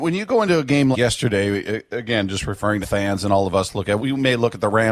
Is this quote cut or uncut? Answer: cut